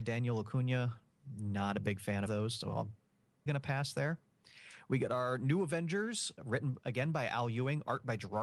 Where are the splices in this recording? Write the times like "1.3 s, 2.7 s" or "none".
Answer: 2.3 s, 3.5 s